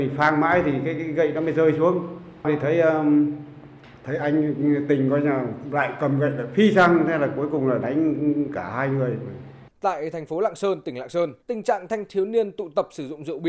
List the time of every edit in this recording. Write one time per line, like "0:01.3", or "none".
0:09.7
0:11.4